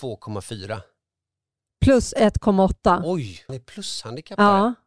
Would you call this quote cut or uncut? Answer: cut